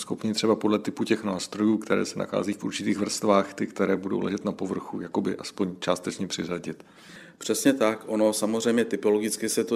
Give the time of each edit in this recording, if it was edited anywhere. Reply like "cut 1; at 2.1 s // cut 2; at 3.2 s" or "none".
none

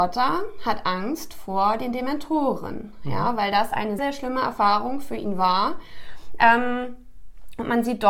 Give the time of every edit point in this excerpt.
cut 1; at 4.0 s

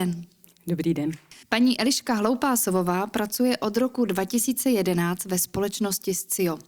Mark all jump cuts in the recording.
cut 1; at 1.4 s

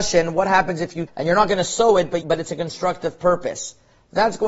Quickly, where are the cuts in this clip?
cut 1; at 1.1 s // cut 2; at 2.2 s

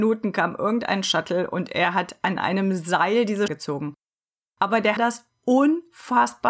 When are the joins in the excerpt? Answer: cut 1; at 3.5 s // cut 2; at 5.0 s

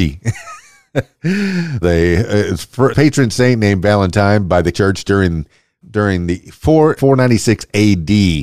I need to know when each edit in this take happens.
cut 1; at 1.8 s // cut 2; at 2.9 s // cut 3; at 4.7 s // cut 4; at 5.8 s // cut 5; at 7.0 s

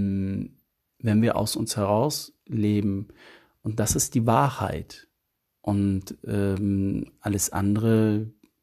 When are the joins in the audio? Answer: none

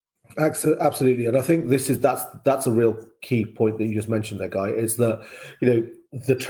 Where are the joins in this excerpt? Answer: none

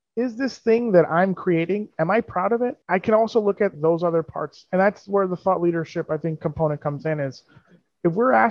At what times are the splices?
cut 1; at 2.8 s // cut 2; at 3.7 s

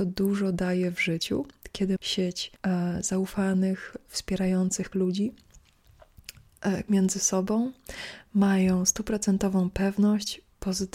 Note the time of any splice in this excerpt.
cut 1; at 2.0 s // cut 2; at 2.6 s // cut 3; at 4.9 s // cut 4; at 6.9 s

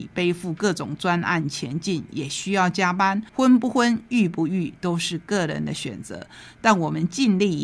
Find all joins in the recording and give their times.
cut 1; at 3.3 s

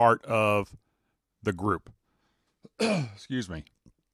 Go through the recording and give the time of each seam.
none

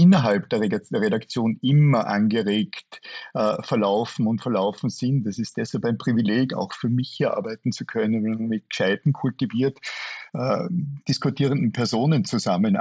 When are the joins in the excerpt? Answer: none

